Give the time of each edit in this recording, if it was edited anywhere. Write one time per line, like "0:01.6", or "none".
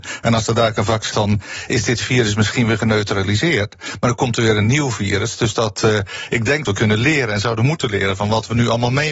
0:01.1
0:06.6